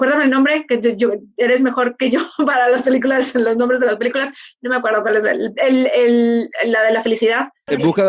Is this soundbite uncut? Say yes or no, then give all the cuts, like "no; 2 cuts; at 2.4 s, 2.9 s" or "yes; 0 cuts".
yes; 0 cuts